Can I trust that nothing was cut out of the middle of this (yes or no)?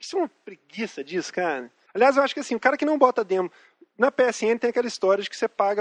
no